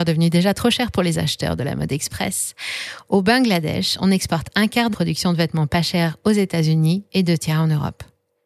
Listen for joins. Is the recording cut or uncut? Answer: cut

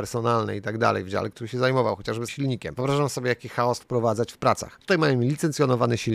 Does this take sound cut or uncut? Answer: cut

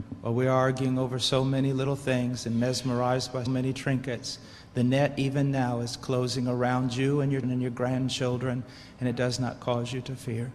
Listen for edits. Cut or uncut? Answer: cut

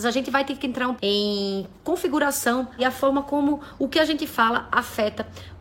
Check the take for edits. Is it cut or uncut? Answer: cut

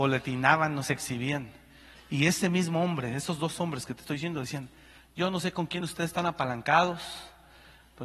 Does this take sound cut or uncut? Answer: uncut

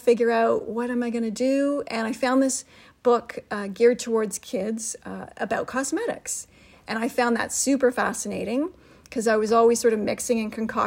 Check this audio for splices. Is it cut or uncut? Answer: uncut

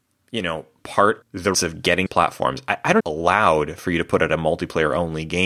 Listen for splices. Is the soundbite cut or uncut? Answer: cut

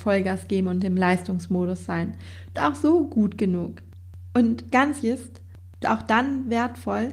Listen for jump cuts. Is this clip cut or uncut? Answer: cut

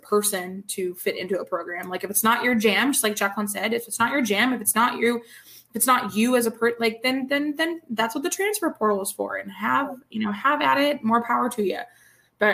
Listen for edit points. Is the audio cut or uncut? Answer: uncut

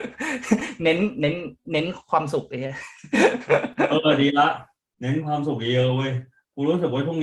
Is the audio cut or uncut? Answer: uncut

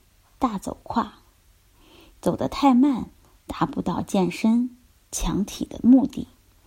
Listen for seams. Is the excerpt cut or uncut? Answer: uncut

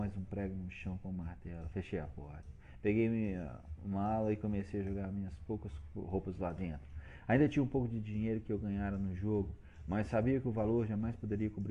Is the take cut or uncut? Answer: uncut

